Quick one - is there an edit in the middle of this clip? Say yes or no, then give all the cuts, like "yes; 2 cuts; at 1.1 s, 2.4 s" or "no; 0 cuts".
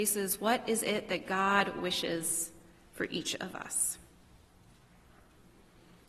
no; 0 cuts